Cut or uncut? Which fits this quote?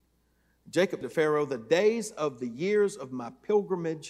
cut